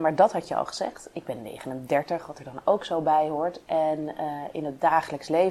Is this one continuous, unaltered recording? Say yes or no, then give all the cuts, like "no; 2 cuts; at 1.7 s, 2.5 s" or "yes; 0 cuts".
yes; 0 cuts